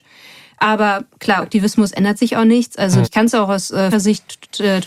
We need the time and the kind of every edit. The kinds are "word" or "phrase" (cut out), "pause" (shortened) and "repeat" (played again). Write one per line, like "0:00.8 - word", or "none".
0:01.4 - word
0:03.0 - word
0:03.9 - word